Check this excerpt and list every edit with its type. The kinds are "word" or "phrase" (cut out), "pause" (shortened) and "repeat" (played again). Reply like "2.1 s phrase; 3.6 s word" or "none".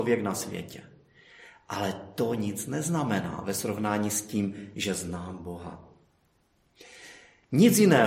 none